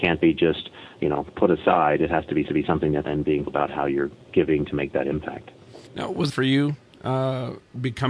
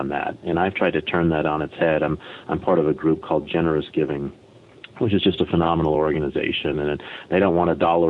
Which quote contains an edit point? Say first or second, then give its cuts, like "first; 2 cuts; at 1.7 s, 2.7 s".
first; 6 cuts; at 2.5 s, 3.0 s, 3.5 s, 4.2 s, 5.9 s, 6.3 s